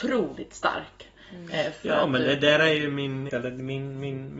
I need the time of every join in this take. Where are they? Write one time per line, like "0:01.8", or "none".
0:03.3